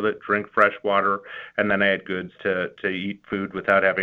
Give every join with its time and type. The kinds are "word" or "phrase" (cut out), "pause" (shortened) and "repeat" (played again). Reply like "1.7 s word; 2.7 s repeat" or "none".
2.0 s word; 2.3 s word